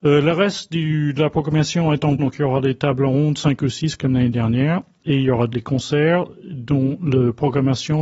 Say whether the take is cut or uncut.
cut